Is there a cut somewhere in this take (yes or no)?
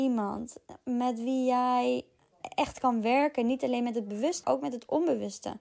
yes